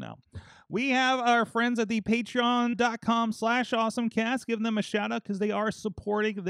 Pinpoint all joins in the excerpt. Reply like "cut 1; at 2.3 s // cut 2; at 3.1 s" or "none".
cut 1; at 2.7 s